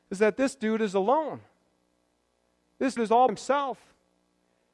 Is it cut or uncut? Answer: cut